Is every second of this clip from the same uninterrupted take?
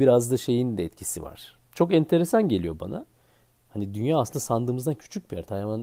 no; 1 cut; at 1.6 s

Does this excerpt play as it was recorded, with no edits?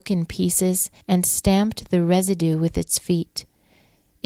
no; 1 cut; at 1.0 s

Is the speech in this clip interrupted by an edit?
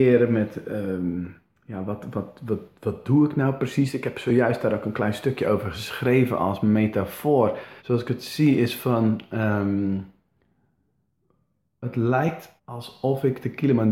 yes; 2 cuts; at 7.8 s, 12.6 s

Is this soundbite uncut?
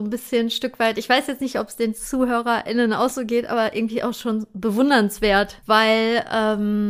yes; 0 cuts

